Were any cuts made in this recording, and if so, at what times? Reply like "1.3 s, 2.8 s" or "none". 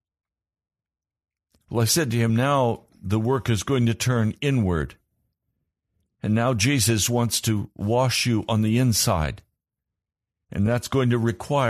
none